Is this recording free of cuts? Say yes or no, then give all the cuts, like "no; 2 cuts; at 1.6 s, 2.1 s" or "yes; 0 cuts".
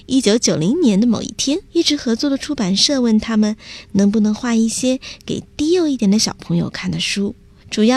no; 1 cut; at 1.7 s